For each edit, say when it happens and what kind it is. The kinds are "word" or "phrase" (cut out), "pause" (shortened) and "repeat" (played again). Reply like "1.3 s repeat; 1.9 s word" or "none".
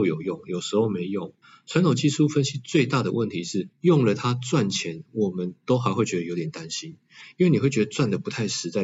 1.4 s pause; 3.7 s pause